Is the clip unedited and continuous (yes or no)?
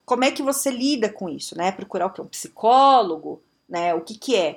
yes